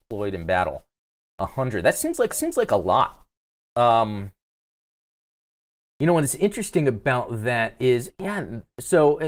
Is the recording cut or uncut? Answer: cut